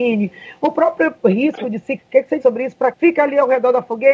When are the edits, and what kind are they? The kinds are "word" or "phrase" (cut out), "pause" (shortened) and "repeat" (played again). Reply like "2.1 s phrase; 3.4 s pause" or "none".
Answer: 2.0 s word; 2.4 s word; 2.9 s word